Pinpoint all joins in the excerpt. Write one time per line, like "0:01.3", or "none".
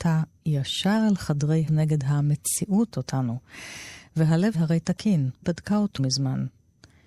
0:01.7
0:02.9
0:04.5
0:05.4
0:06.0